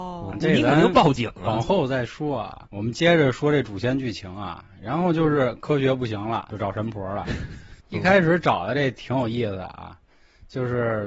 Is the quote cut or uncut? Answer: cut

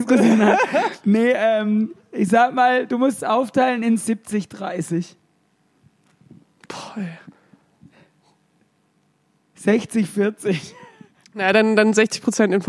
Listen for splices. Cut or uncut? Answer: uncut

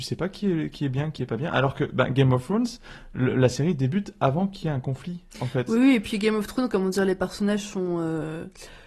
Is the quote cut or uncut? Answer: cut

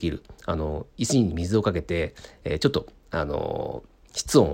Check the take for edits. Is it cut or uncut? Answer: uncut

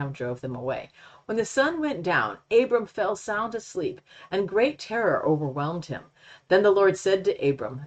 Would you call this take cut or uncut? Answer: uncut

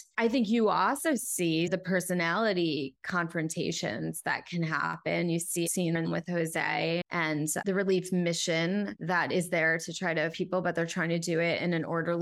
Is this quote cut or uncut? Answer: cut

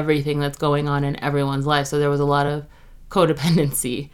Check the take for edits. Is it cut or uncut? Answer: uncut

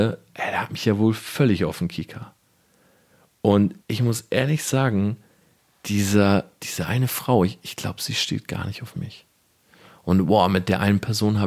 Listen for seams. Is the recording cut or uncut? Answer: cut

